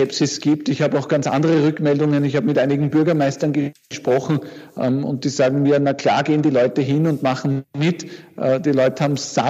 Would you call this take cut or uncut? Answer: uncut